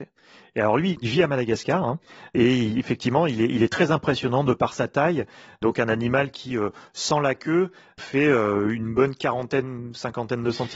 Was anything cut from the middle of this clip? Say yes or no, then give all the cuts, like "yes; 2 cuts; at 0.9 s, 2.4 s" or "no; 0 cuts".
no; 0 cuts